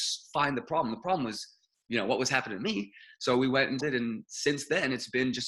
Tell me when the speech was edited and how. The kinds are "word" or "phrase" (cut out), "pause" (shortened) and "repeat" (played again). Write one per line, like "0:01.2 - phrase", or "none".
0:03.8 - word

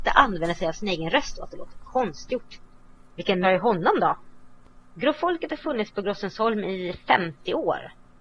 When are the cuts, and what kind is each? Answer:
0:03.4 - phrase

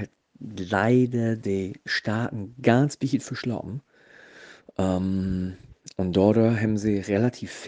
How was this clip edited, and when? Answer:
none

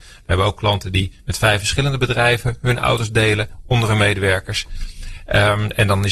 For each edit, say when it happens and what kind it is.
none

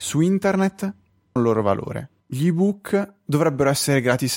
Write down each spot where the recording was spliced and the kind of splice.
0:01.4 - word
0:02.2 - pause

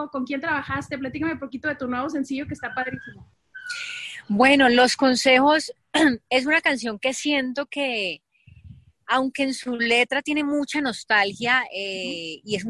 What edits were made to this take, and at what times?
none

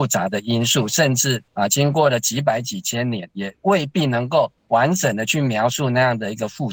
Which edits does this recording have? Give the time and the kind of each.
0:01.5 - pause
0:04.6 - pause

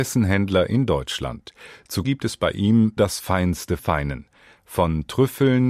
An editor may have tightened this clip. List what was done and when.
0:02.0 - word
0:03.0 - word
0:03.8 - word

